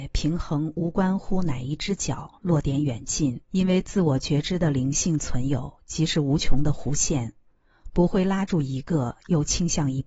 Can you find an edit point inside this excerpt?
yes; 1 cut; at 3.4 s

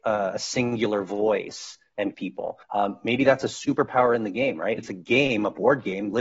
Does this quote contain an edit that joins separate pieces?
yes; 3 cuts; at 2.1 s, 2.6 s, 4.8 s

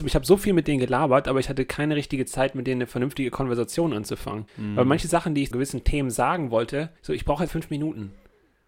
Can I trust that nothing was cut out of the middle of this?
no; 4 cuts; at 4.5 s, 5.5 s, 7.0 s, 7.5 s

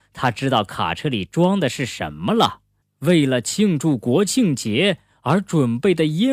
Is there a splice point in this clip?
yes; 1 cut; at 2.8 s

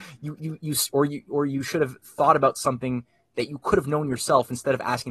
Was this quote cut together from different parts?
no; 0 cuts

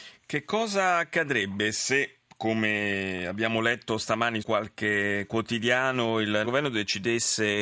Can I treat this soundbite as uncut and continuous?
no; 2 cuts; at 4.4 s, 6.4 s

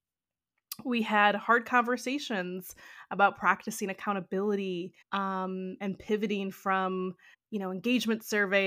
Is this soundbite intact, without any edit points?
no; 2 cuts; at 5.0 s, 7.3 s

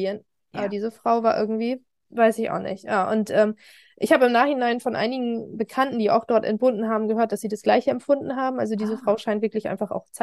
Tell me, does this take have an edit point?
no; 0 cuts

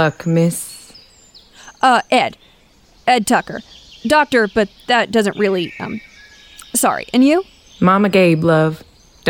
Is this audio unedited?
yes; 0 cuts

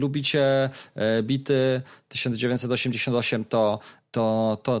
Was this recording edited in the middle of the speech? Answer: no; 0 cuts

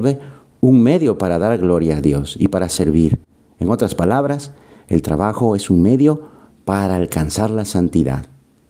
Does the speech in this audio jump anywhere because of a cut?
no; 0 cuts

